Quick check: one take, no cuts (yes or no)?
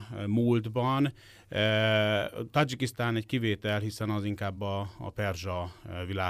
yes